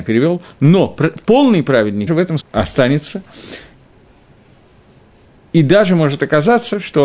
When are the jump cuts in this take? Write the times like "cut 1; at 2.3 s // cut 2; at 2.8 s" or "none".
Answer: cut 1; at 2.1 s // cut 2; at 2.4 s

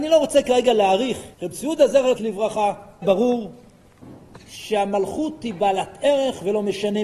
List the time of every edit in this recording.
cut 1; at 1.3 s // cut 2; at 2.2 s // cut 3; at 3.0 s

